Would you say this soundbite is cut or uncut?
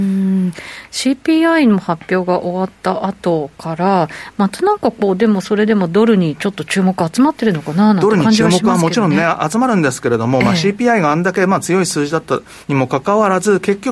uncut